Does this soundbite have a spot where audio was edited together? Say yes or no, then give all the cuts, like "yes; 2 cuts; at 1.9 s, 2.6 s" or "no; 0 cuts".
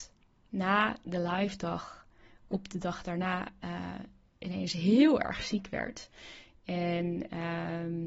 no; 0 cuts